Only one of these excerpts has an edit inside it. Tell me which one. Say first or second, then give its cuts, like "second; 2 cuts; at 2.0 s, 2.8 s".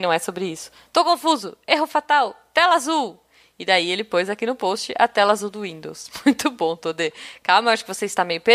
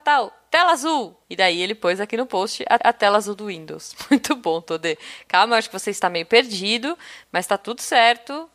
second; 2 cuts; at 1.2 s, 2.8 s